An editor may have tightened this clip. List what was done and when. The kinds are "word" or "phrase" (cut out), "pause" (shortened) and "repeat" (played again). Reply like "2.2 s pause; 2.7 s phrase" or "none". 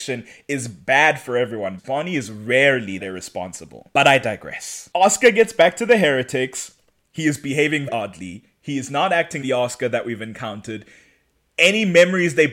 1.8 s word; 3.0 s word; 7.9 s word; 9.4 s word